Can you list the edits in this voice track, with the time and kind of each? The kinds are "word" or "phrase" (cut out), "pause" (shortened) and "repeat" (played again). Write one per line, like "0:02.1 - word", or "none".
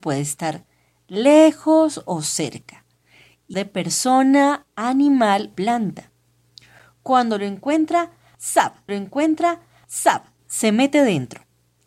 0:03.5 - word
0:05.5 - word
0:08.9 - repeat